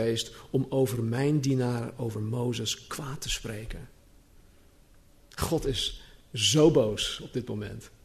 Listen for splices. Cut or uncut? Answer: uncut